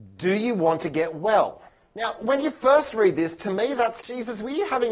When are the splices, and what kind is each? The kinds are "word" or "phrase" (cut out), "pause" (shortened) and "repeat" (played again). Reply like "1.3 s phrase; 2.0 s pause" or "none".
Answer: 1.7 s pause; 4.0 s word